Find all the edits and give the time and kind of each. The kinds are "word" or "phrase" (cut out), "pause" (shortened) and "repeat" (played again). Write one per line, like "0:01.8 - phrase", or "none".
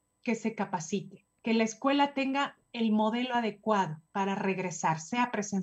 0:01.4 - pause
0:04.0 - pause